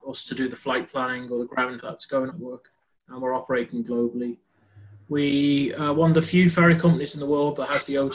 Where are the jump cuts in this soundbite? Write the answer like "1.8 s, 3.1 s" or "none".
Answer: 1.8 s, 2.3 s, 3.0 s